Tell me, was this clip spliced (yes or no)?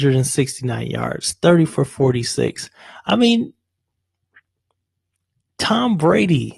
no